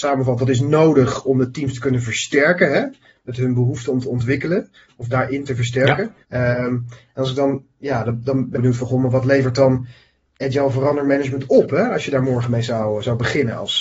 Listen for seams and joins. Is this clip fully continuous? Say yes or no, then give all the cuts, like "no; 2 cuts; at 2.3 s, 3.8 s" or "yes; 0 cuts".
no; 2 cuts; at 6.2 s, 8.5 s